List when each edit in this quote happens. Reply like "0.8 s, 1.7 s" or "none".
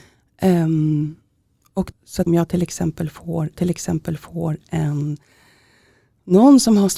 1.9 s, 2.3 s, 3.5 s